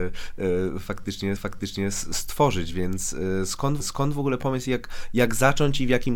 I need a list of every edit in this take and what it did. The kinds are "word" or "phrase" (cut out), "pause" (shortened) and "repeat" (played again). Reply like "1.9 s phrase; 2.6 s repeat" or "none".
1.4 s repeat; 3.8 s repeat